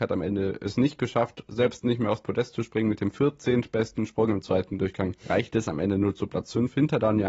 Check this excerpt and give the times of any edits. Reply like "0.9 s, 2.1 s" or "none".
5.2 s